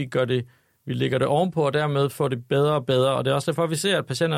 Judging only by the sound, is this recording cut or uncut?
uncut